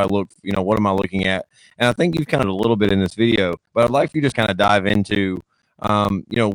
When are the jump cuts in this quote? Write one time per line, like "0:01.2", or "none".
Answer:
0:02.4
0:03.7
0:04.3